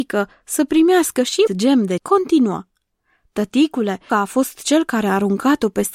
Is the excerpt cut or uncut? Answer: cut